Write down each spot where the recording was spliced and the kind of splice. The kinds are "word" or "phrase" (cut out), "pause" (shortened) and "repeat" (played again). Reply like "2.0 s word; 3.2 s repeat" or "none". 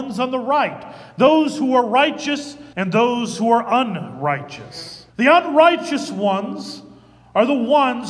2.7 s pause; 5.1 s pause